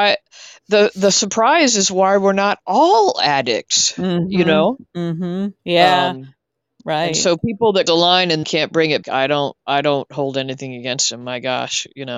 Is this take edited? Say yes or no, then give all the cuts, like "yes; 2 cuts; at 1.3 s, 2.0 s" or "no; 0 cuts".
yes; 6 cuts; at 4.9 s, 5.6 s, 6.5 s, 7.9 s, 8.4 s, 9.0 s